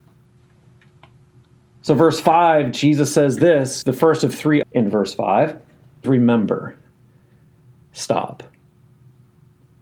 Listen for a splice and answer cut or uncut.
cut